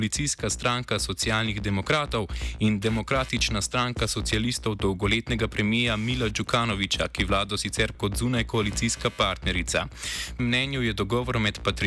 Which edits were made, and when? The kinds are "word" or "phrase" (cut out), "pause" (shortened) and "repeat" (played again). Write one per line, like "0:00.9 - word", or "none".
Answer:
0:07.9 - word
0:10.4 - word